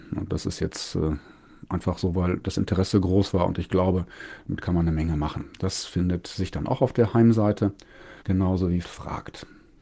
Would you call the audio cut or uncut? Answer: cut